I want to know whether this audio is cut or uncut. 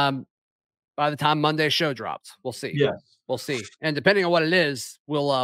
uncut